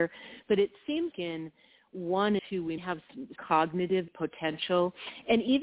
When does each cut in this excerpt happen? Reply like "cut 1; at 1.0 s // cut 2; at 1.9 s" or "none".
cut 1; at 1.1 s // cut 2; at 2.4 s // cut 3; at 2.8 s // cut 4; at 3.4 s // cut 5; at 4.1 s